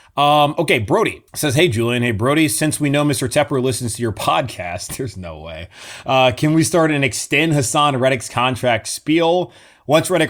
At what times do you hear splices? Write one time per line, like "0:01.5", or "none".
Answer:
0:01.3